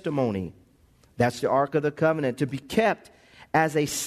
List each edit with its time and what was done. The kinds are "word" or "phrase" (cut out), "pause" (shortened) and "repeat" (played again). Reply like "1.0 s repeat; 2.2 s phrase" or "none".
none